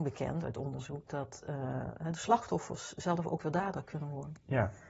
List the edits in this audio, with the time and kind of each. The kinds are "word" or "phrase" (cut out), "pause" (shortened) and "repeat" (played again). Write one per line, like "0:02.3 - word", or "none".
none